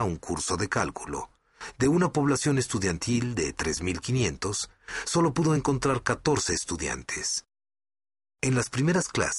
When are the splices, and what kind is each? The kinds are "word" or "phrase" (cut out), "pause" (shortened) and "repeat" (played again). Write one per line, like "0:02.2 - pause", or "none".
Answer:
none